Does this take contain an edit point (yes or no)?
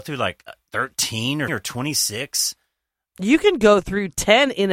yes